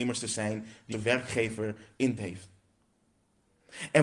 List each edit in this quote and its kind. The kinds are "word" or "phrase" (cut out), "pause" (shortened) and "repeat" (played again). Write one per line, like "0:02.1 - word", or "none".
0:00.9 - word
0:02.2 - word